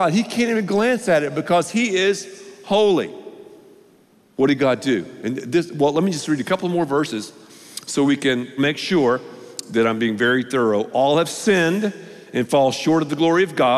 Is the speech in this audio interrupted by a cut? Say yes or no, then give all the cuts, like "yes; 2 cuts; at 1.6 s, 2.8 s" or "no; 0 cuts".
no; 0 cuts